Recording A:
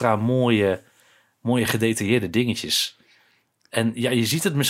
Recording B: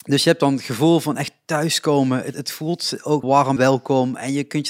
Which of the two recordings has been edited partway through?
B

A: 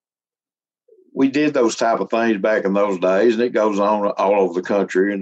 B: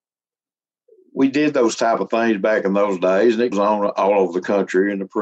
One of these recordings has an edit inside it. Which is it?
B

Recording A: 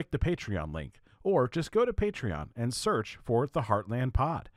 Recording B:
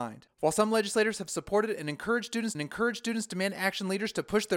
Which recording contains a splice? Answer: B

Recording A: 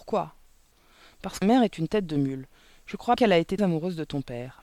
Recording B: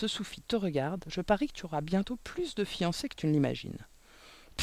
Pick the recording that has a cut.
A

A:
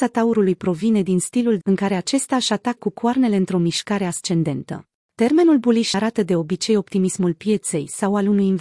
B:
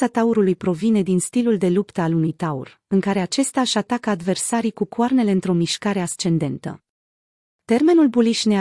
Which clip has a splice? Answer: A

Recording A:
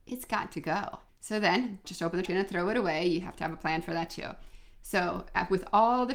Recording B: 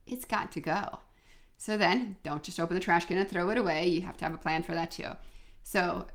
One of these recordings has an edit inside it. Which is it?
A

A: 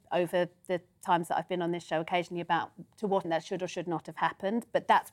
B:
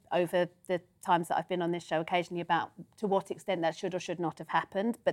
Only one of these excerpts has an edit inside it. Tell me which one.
A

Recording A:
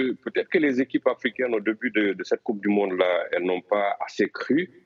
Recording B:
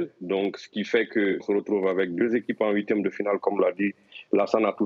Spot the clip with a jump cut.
B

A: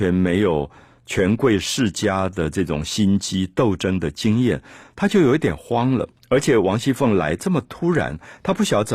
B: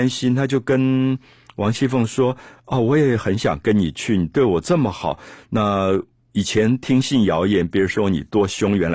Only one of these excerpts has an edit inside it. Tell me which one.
A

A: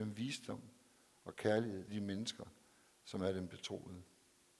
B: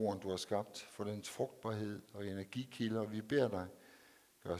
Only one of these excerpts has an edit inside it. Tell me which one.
A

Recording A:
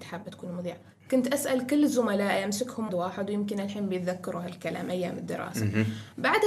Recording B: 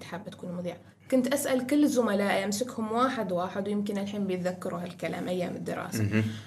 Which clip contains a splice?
A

